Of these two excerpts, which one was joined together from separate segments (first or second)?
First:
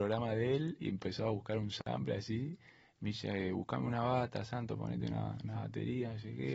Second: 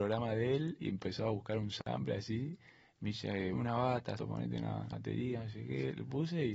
second